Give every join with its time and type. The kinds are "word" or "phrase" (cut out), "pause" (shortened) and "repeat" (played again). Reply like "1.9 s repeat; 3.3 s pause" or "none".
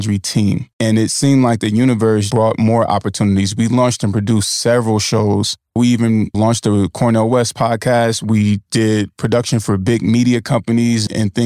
2.3 s word

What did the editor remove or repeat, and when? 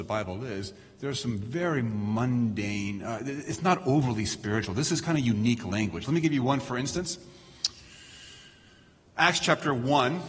none

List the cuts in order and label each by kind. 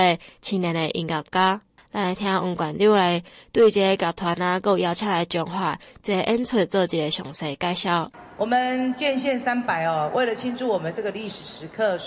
none

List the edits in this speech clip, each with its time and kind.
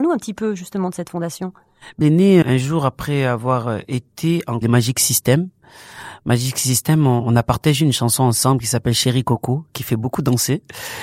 2.0 s phrase; 2.4 s word; 4.6 s phrase

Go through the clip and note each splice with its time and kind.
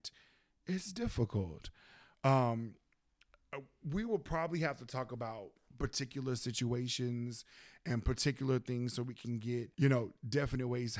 9.7 s pause

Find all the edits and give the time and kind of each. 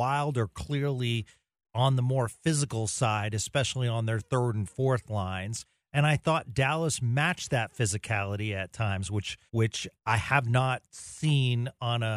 9.5 s pause

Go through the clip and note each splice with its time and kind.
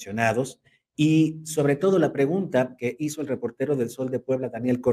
none

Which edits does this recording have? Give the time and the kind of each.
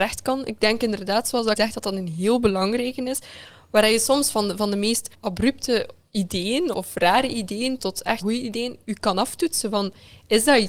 1.6 s word; 5.1 s pause; 6.7 s word; 7.8 s word; 8.2 s word

